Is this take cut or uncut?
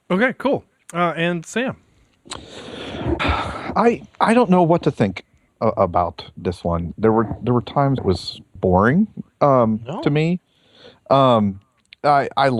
cut